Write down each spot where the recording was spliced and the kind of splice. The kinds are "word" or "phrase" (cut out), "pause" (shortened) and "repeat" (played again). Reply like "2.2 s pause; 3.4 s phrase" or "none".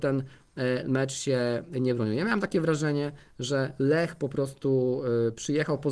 none